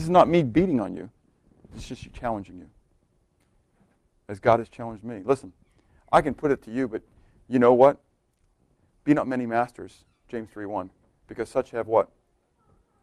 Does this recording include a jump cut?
no; 0 cuts

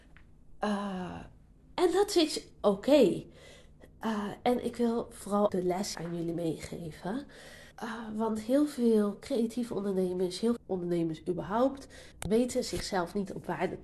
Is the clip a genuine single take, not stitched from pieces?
no; 5 cuts; at 5.5 s, 5.9 s, 7.7 s, 10.6 s, 12.1 s

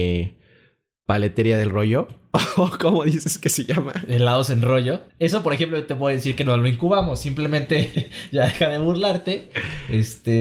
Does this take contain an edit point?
yes; 1 cut; at 5.1 s

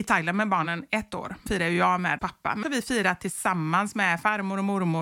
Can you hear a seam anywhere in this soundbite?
yes; 3 cuts; at 1.5 s, 2.2 s, 2.6 s

